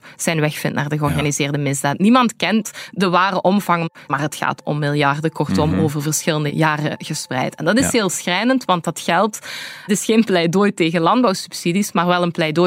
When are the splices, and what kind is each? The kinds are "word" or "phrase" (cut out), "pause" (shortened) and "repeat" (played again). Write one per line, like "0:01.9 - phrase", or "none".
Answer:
0:04.6 - word
0:09.9 - word